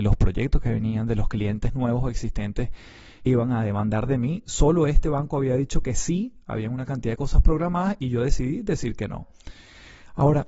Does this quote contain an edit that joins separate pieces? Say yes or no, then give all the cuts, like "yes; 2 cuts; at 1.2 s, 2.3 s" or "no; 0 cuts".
yes; 1 cut; at 3.3 s